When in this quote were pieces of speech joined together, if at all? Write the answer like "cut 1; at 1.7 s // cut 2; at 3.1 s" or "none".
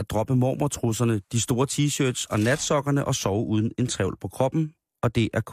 none